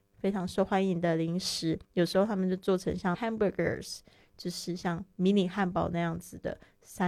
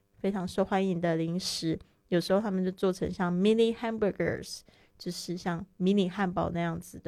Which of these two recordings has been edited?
first; 2 cuts; at 1.8 s, 3.1 s

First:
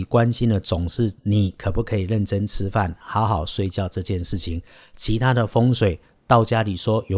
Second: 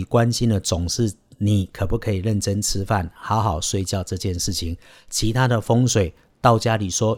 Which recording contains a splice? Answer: first; 1 cut; at 1.2 s

